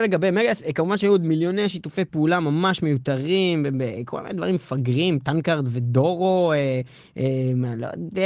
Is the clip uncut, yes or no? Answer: yes